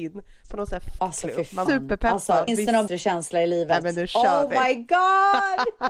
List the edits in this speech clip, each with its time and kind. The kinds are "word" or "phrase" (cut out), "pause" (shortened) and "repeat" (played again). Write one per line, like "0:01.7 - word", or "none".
0:01.0 - word
0:01.7 - word
0:02.5 - phrase
0:02.9 - word